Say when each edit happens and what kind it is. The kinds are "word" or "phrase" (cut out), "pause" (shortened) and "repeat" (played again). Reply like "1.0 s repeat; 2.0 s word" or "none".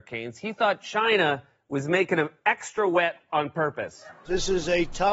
none